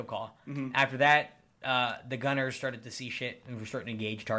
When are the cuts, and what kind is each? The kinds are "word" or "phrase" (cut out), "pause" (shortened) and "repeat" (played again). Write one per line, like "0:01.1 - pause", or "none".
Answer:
none